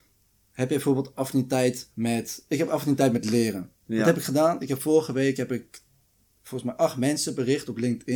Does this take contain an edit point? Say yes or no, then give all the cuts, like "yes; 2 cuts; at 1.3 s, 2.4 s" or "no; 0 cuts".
yes; 1 cut; at 1.9 s